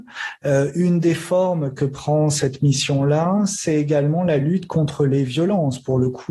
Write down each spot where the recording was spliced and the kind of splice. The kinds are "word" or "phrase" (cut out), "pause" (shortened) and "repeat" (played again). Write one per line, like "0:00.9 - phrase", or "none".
none